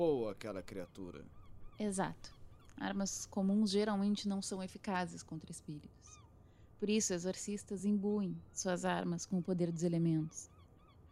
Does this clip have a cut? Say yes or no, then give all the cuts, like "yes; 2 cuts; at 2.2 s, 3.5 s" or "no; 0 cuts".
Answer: no; 0 cuts